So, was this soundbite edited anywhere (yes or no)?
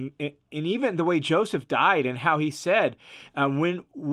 no